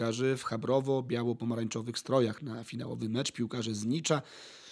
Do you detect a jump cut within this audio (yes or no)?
no